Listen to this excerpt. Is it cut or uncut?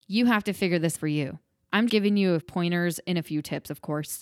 cut